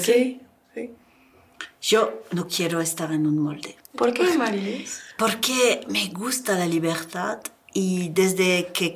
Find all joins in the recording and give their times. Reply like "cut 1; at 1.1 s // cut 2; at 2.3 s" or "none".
cut 1; at 3.8 s